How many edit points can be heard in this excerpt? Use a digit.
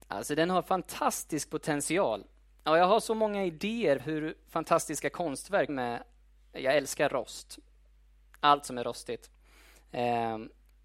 2